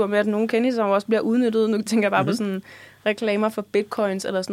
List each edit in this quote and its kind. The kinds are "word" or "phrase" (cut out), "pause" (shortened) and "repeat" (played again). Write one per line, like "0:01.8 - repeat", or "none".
none